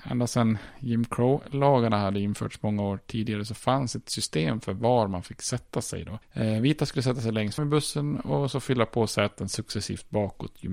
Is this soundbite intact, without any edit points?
no; 1 cut; at 7.6 s

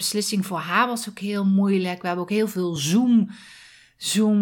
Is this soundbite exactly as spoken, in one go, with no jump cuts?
yes; 0 cuts

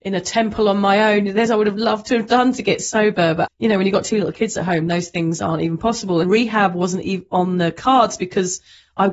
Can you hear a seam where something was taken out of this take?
yes; 3 cuts; at 1.5 s, 3.5 s, 6.2 s

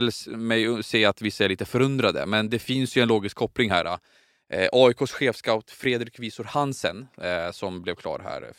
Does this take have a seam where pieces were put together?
no; 0 cuts

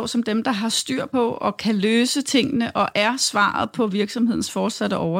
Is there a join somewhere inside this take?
no; 0 cuts

